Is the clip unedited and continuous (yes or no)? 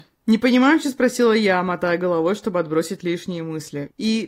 yes